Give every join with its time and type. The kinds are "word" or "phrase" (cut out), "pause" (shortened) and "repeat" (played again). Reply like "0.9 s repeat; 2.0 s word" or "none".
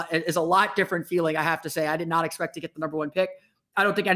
none